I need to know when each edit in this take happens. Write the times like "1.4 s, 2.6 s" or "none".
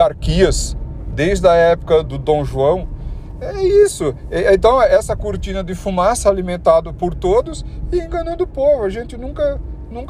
2.1 s